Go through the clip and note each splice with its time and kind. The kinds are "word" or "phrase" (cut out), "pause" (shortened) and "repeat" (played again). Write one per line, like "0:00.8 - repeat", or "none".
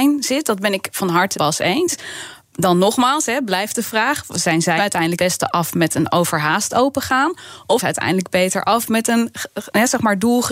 0:01.3 - word
0:04.8 - word
0:05.2 - word
0:07.8 - word

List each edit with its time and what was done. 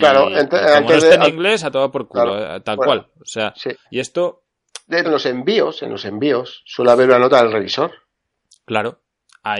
0:03.8 - pause
0:05.0 - phrase

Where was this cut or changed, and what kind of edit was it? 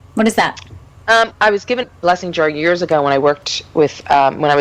0:01.3 - word
0:01.8 - word

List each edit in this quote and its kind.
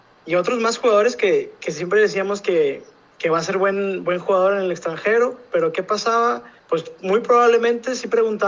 0:06.6 - pause

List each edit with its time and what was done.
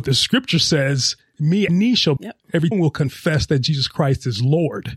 0:01.7 - phrase
0:02.2 - word
0:02.7 - word

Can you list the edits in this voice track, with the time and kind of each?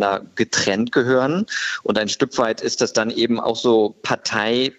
none

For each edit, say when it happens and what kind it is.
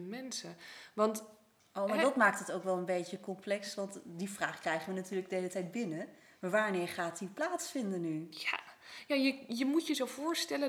none

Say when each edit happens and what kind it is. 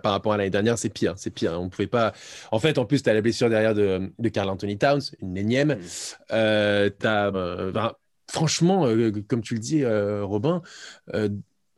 0:07.0 - word
0:07.3 - word
0:08.1 - pause

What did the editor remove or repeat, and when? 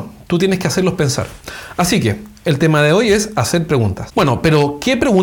none

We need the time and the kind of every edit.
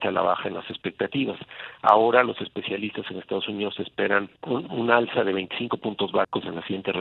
0:04.4 - pause

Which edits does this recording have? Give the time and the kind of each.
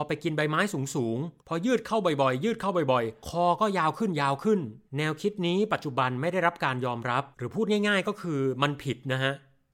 0:01.4 - pause
0:03.2 - word
0:04.9 - pause
0:07.3 - pause

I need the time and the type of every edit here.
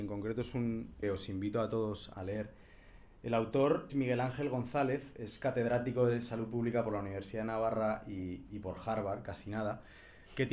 0:01.0 - phrase
0:02.1 - word
0:03.9 - word

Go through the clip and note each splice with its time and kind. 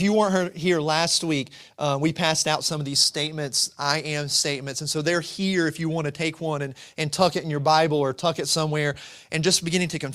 none

